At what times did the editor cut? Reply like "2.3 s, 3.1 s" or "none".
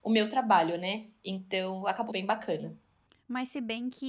2.1 s